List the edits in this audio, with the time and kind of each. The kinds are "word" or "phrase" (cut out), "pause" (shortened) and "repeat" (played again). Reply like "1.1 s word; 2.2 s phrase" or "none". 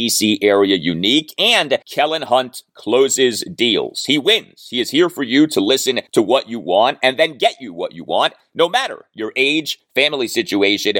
1.8 s pause; 6.1 s pause